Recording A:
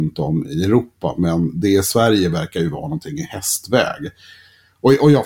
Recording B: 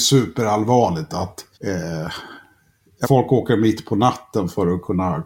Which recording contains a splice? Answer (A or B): B